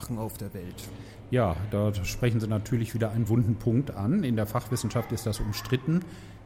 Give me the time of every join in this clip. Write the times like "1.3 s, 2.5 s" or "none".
none